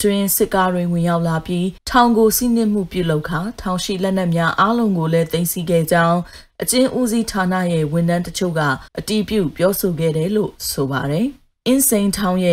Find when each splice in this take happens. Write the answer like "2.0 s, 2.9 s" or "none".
1.8 s, 8.9 s